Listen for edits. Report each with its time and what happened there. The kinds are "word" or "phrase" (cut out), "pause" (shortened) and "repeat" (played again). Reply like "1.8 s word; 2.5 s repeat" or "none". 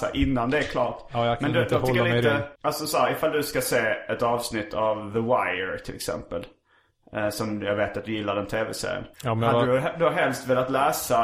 2.5 s pause; 9.1 s pause